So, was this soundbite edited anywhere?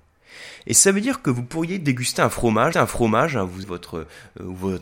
yes; 2 cuts; at 2.7 s, 3.6 s

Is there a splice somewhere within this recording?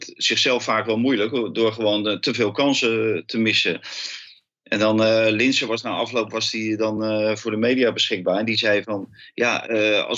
no; 0 cuts

